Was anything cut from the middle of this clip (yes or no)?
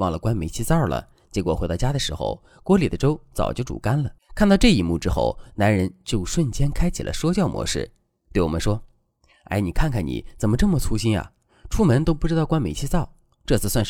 yes